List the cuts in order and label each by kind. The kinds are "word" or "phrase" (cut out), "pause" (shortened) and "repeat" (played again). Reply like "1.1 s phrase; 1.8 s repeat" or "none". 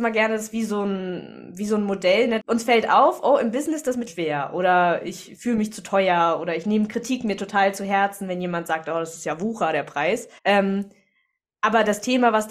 2.4 s word; 4.1 s phrase; 10.4 s pause